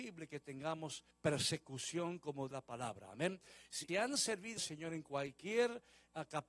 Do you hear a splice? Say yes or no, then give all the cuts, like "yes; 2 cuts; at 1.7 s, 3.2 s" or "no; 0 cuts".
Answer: yes; 4 cuts; at 1.1 s, 2.5 s, 3.9 s, 4.6 s